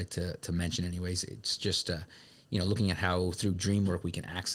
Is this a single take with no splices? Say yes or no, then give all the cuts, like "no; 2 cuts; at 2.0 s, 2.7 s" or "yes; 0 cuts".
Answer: yes; 0 cuts